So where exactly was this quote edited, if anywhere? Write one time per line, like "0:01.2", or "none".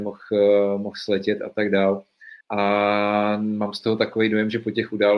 0:02.4